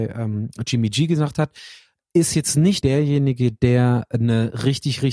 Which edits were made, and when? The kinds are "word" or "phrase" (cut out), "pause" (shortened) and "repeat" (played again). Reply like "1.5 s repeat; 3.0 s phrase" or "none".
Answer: 2.0 s word; 2.8 s word

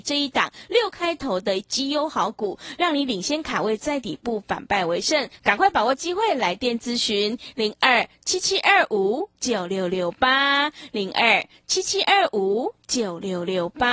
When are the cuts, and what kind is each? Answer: 5.4 s pause

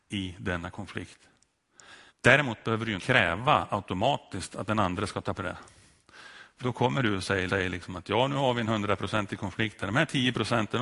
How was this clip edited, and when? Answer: 2.1 s pause; 3.0 s word; 5.4 s phrase; 6.6 s word; 7.5 s repeat

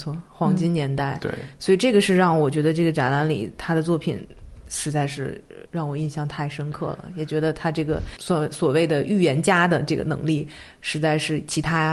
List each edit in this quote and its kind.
5.6 s pause

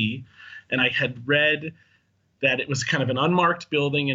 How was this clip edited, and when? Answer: none

